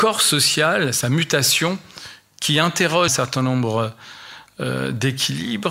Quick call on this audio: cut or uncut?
cut